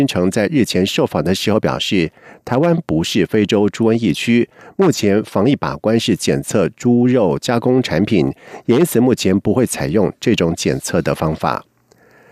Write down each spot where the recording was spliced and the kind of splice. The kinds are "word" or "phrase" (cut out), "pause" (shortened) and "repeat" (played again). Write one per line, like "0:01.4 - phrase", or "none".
none